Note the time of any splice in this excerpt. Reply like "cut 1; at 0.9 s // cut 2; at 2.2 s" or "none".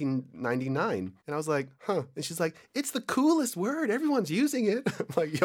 cut 1; at 1.2 s // cut 2; at 1.7 s